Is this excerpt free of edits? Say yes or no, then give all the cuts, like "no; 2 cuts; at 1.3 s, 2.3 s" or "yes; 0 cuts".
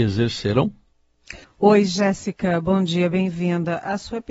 no; 1 cut; at 1.4 s